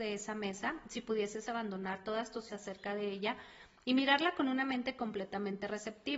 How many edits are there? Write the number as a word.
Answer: one